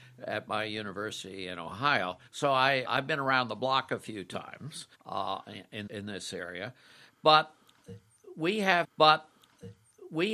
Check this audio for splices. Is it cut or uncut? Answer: cut